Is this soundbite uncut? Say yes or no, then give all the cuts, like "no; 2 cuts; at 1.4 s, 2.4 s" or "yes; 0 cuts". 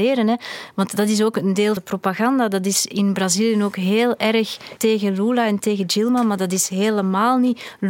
no; 2 cuts; at 1.8 s, 4.8 s